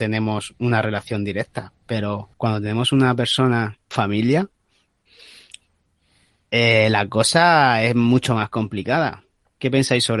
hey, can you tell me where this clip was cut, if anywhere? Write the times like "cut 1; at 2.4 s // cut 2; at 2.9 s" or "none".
cut 1; at 2.3 s // cut 2; at 3.9 s